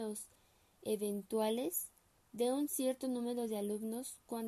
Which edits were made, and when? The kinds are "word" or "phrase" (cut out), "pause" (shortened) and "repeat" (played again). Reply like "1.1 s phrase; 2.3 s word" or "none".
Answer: none